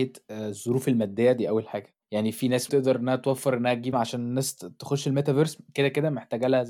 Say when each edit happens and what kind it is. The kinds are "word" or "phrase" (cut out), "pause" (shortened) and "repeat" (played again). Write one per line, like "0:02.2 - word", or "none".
0:02.0 - pause
0:02.7 - word
0:03.9 - phrase